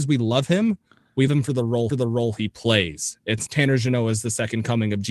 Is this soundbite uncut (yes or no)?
no